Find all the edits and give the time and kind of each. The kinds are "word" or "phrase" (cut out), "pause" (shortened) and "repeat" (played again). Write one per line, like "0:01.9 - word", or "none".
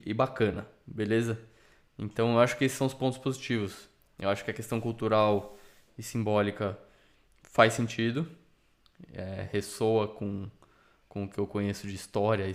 none

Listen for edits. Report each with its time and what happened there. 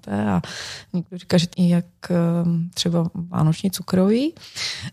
0:01.5 - word

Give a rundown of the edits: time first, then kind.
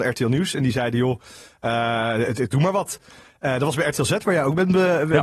none

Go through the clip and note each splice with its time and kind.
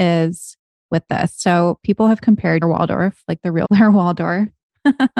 0:02.6 - phrase
0:03.6 - word

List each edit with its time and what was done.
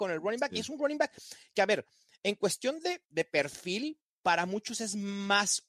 0:03.1 - word

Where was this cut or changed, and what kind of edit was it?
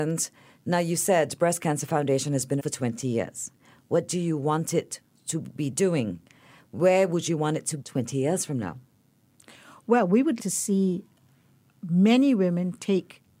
0:02.6 - word
0:07.8 - word
0:10.4 - word

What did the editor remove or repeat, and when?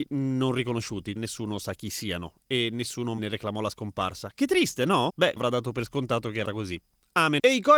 0:01.2 - word
0:03.2 - word
0:05.4 - word
0:06.4 - word

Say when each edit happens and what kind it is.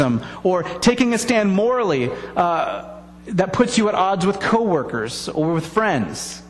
0:03.2 - pause

